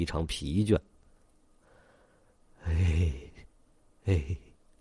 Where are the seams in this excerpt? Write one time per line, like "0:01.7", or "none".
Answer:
none

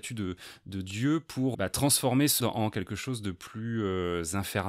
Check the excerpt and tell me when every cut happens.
0:01.5
0:02.4

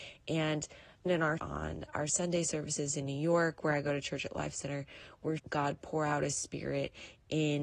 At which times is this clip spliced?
0:01.1
0:01.4
0:05.4

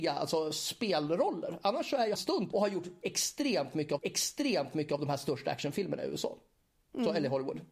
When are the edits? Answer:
0:02.2
0:02.5
0:04.0

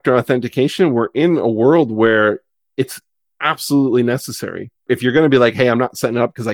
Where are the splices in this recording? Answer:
0:04.8

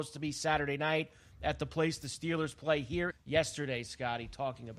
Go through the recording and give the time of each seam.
0:03.1

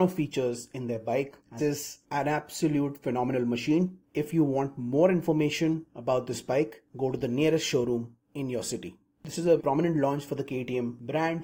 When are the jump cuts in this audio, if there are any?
0:01.6
0:09.6

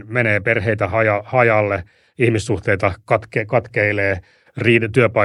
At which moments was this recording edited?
none

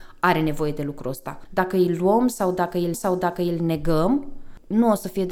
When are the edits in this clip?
0:02.9

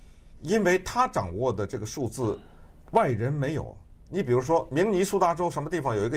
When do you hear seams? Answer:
none

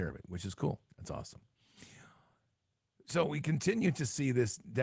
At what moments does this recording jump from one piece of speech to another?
none

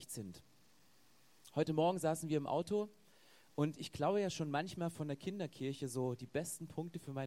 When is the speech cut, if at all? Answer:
none

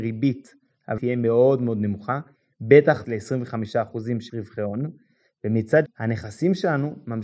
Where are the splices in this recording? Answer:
0:01.0
0:03.0
0:04.3
0:05.9

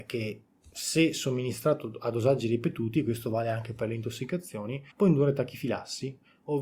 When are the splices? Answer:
0:04.9

